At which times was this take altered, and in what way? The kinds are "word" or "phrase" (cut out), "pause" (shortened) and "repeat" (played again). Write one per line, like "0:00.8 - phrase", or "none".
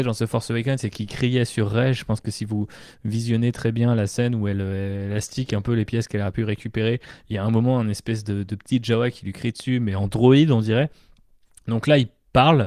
none